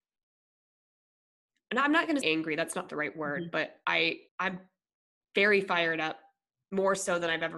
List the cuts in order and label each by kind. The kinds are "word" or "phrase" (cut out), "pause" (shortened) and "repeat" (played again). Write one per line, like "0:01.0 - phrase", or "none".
0:02.2 - word
0:04.3 - pause